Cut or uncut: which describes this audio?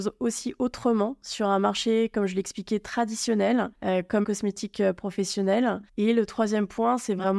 cut